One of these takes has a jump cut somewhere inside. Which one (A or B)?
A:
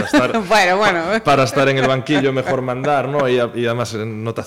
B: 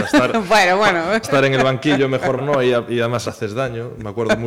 B